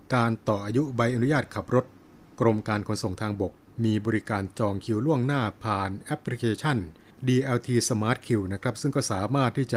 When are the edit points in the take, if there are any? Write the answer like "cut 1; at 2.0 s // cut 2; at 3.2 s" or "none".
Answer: none